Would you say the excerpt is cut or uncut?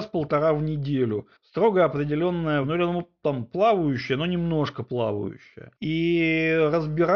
cut